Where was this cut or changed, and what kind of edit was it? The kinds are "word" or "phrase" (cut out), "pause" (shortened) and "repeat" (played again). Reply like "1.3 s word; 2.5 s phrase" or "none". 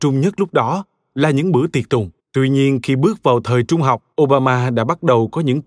2.2 s pause; 4.1 s pause